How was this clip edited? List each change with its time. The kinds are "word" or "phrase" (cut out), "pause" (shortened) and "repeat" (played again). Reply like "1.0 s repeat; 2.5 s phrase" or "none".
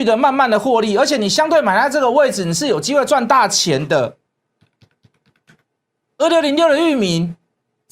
none